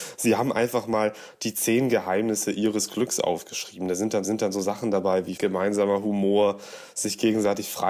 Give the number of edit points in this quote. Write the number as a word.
two